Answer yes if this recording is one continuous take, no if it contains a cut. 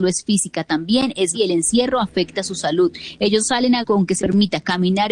no